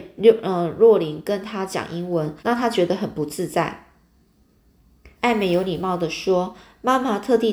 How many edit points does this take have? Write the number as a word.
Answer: two